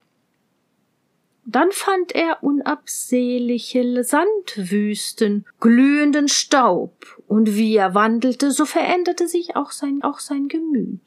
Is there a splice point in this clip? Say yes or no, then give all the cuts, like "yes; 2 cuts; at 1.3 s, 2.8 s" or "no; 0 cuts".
yes; 2 cuts; at 5.5 s, 10.0 s